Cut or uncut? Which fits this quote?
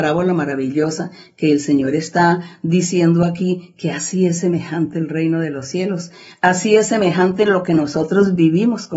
uncut